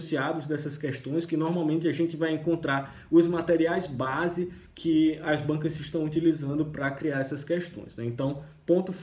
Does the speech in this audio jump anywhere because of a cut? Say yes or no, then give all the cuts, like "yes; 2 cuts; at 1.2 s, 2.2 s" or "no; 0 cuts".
no; 0 cuts